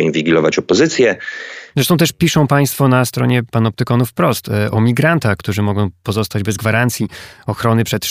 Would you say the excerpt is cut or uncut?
uncut